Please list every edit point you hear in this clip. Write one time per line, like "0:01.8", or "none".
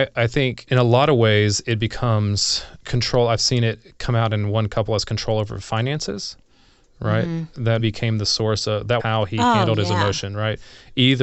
0:07.8
0:09.0